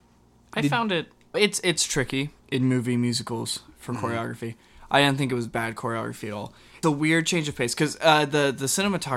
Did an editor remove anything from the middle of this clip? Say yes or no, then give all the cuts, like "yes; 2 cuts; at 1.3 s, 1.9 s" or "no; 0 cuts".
yes; 3 cuts; at 1.3 s, 2.4 s, 6.8 s